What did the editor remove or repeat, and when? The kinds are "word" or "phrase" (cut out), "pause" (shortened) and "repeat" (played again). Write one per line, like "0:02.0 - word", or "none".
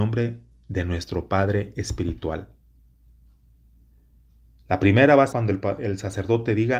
0:05.3 - word